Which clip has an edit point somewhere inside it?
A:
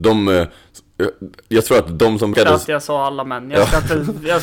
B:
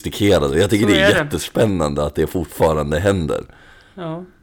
A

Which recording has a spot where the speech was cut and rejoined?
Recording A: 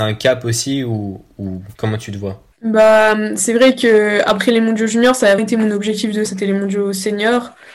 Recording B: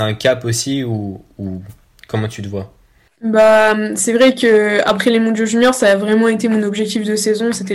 A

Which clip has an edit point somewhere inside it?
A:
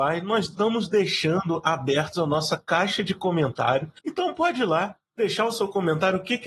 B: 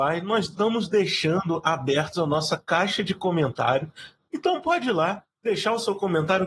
A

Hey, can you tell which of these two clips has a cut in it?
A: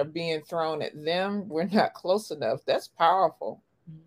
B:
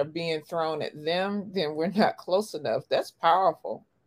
A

